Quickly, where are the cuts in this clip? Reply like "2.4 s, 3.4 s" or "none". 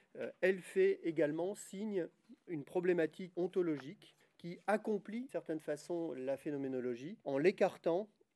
2.5 s, 3.3 s, 4.2 s, 5.3 s, 7.2 s